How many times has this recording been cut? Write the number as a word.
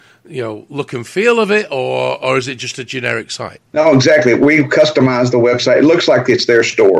one